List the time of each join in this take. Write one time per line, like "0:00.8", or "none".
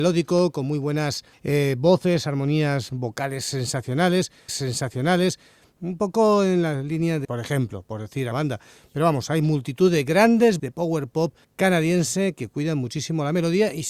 0:01.3
0:04.5
0:07.2
0:08.3
0:10.6
0:11.4